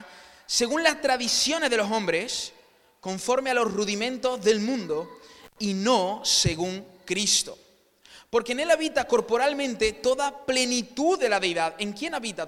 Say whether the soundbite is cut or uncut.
uncut